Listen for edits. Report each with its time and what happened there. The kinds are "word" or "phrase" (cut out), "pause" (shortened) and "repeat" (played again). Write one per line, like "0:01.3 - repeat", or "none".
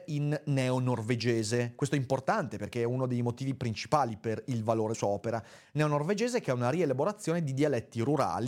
0:04.9 - word